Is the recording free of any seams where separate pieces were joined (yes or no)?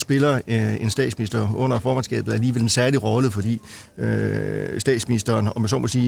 yes